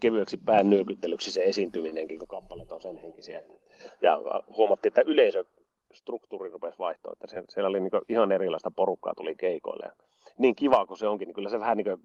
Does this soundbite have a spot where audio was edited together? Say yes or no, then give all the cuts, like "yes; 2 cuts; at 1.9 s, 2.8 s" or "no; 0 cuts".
no; 0 cuts